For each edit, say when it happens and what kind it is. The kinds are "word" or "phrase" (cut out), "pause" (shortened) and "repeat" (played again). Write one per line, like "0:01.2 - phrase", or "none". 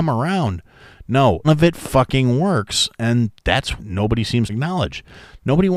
0:01.4 - word
0:03.8 - word
0:04.5 - phrase

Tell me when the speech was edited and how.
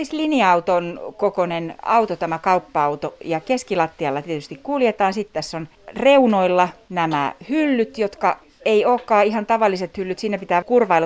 none

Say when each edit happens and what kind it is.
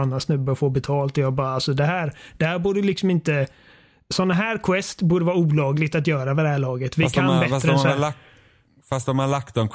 none

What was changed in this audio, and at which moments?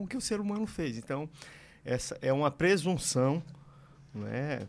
none

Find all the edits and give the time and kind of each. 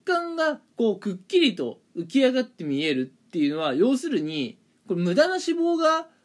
none

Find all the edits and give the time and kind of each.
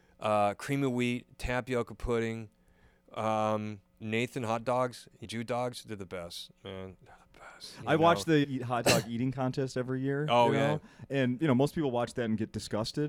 0:04.0 - word
0:05.2 - word
0:08.4 - word

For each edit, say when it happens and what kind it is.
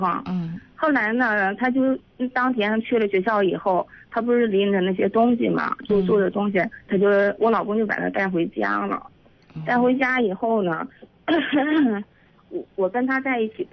0:06.9 - word

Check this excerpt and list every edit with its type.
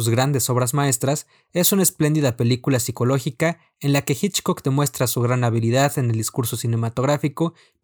none

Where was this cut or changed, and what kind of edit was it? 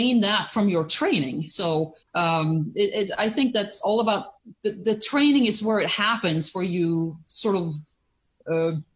0:02.0 - pause

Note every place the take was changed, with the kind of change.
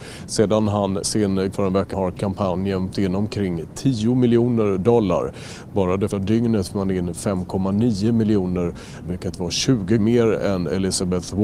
0:01.0 - word
0:01.5 - word
0:01.9 - word
0:02.9 - word
0:06.1 - word
0:06.7 - word
0:09.0 - word
0:10.0 - word

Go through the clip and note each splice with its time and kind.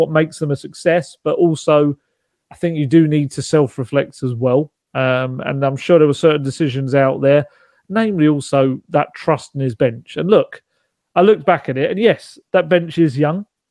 none

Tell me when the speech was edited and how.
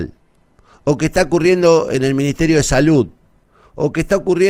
none

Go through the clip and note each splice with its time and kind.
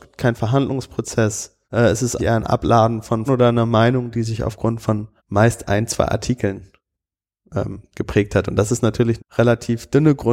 0:01.6 - pause
0:02.2 - word
0:03.3 - word
0:05.2 - pause
0:09.2 - word

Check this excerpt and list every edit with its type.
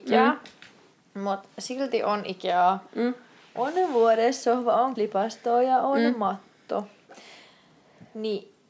0:05.0 - word

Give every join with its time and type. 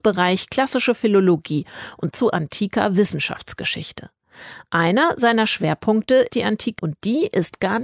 0:02.1 - word
0:06.3 - word
0:06.8 - word

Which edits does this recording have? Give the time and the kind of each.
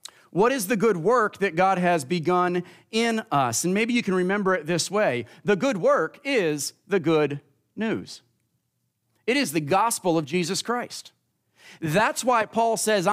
none

